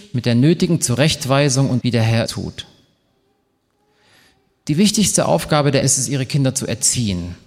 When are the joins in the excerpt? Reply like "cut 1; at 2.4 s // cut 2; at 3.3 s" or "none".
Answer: cut 1; at 1.8 s // cut 2; at 2.3 s // cut 3; at 5.8 s